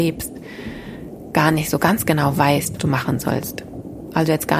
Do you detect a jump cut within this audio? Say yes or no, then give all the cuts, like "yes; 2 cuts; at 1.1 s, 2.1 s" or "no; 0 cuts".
yes; 1 cut; at 2.8 s